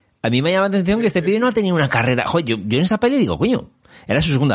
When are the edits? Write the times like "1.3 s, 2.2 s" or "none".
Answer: none